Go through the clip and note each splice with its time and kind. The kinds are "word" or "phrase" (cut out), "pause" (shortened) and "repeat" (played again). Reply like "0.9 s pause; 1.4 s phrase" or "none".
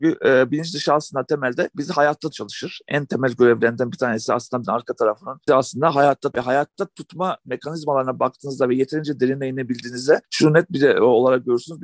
2.3 s word; 4.6 s word; 5.5 s word; 6.3 s word